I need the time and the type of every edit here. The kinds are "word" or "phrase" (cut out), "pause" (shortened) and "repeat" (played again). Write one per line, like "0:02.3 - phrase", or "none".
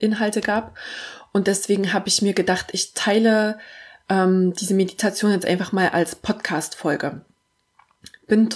none